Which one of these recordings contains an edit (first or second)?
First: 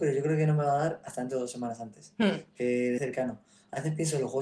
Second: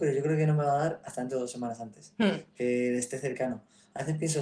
first